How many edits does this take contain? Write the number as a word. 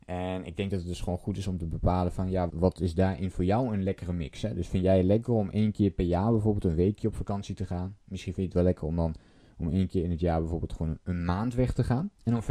one